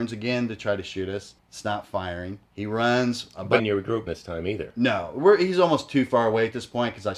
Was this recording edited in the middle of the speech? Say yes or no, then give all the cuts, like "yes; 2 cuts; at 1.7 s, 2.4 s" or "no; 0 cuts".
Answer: yes; 4 cuts; at 1.4 s, 2.4 s, 3.6 s, 4.1 s